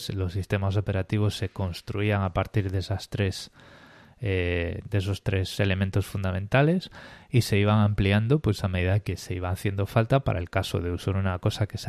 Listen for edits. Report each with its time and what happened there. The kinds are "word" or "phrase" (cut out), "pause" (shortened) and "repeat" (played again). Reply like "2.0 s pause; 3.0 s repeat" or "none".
none